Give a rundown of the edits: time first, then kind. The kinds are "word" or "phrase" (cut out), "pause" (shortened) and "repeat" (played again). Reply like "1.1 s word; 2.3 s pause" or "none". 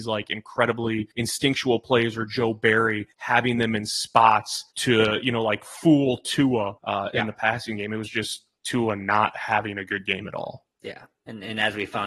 1.1 s pause; 3.1 s pause; 4.7 s pause; 6.8 s pause; 10.7 s pause